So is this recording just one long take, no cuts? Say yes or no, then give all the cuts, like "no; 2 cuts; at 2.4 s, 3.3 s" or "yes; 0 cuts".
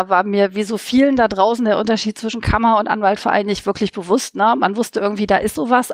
yes; 0 cuts